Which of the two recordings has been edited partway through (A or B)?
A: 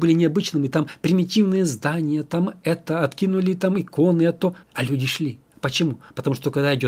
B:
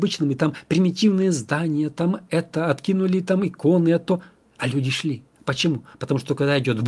A